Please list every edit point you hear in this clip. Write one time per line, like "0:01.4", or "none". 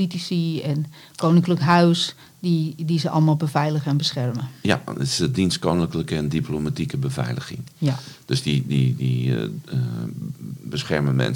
none